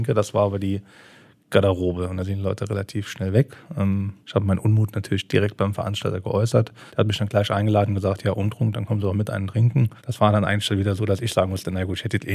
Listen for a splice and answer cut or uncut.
cut